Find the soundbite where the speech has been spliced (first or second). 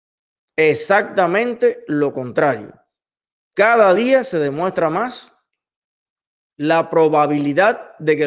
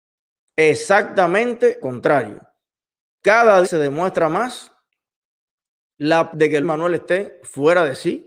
second